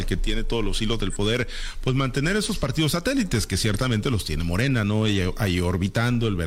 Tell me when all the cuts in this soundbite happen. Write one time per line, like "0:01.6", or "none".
none